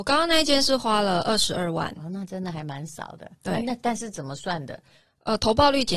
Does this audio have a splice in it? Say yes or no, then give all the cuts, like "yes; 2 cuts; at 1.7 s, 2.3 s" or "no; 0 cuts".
no; 0 cuts